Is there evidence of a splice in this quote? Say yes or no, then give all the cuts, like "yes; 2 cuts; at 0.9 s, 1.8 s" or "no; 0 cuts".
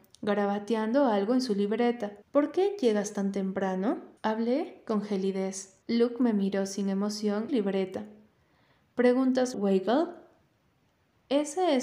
yes; 5 cuts; at 2.2 s, 4.2 s, 5.8 s, 7.5 s, 9.5 s